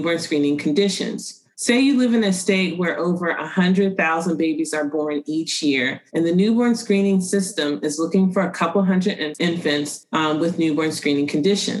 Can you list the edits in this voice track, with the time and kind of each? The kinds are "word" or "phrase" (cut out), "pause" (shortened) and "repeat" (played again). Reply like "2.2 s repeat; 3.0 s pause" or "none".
1.5 s pause; 6.1 s pause